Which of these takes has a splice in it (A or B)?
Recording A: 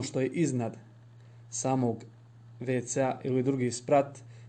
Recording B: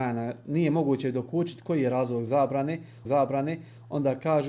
B